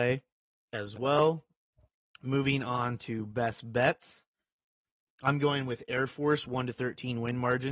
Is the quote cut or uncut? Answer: uncut